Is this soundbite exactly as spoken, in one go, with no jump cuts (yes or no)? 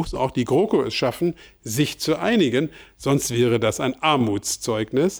yes